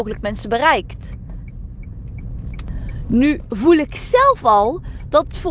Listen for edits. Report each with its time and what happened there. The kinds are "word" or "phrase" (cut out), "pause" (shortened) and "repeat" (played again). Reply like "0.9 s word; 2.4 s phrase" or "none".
none

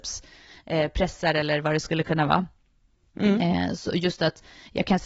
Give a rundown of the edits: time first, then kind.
none

